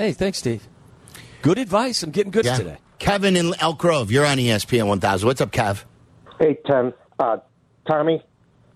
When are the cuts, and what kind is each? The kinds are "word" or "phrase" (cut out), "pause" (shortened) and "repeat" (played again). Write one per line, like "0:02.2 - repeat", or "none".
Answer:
0:02.4 - word